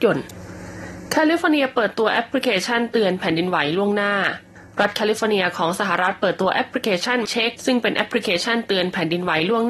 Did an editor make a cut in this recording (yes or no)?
yes